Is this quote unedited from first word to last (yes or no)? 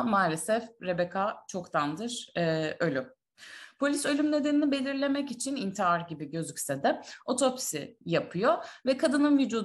yes